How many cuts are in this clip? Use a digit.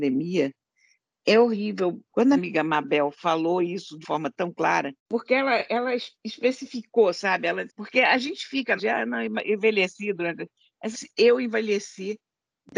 7